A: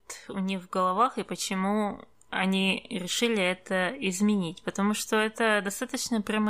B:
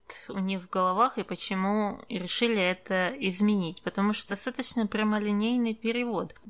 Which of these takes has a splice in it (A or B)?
B